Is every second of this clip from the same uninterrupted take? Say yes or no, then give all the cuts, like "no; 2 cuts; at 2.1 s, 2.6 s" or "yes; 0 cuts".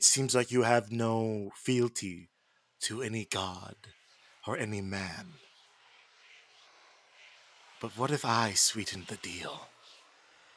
yes; 0 cuts